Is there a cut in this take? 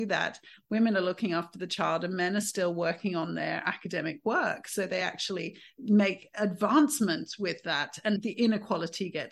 no; 0 cuts

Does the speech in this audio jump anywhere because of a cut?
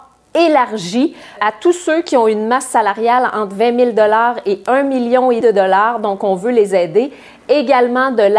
yes; 2 cuts; at 1.4 s, 5.4 s

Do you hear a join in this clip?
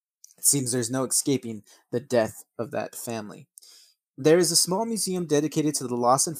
no; 0 cuts

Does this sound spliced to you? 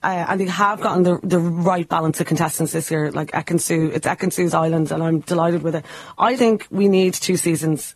yes; 1 cut; at 6.4 s

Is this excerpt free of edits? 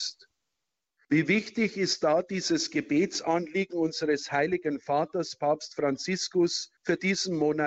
no; 1 cut; at 6.8 s

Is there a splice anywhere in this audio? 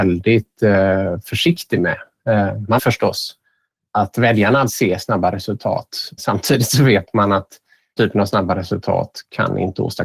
yes; 5 cuts; at 2.8 s, 3.9 s, 4.7 s, 6.2 s, 8.0 s

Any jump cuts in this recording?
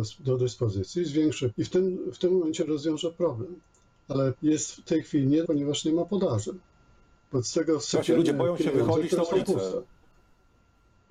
yes; 3 cuts; at 1.5 s, 4.3 s, 5.4 s

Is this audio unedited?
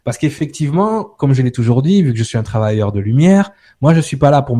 yes; 0 cuts

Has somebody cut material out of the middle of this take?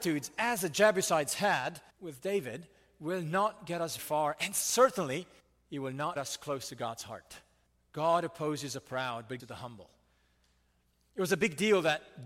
yes; 6 cuts; at 1.9 s, 4.0 s, 5.4 s, 6.2 s, 7.7 s, 9.4 s

